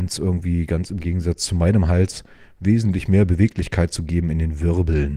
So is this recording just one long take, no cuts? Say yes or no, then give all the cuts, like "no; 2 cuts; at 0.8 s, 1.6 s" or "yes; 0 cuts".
yes; 0 cuts